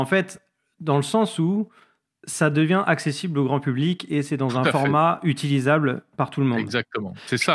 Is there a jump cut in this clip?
no; 0 cuts

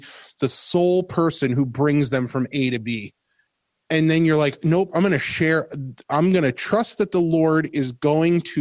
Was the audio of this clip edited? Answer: no; 0 cuts

